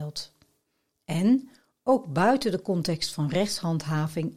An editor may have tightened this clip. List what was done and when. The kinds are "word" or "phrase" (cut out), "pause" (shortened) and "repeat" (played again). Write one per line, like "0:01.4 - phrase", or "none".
none